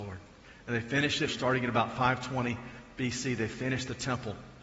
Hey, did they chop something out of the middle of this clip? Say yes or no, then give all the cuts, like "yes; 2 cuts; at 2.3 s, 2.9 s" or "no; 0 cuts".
yes; 1 cut; at 1.3 s